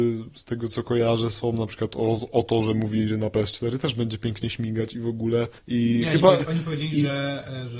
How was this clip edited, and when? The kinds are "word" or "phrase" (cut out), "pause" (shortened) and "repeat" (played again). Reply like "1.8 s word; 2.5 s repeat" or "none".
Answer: 5.6 s pause